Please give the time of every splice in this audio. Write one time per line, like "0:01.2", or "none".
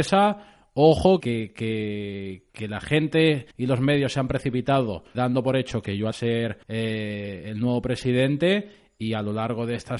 0:01.2
0:02.5
0:03.5
0:05.1
0:06.1
0:06.6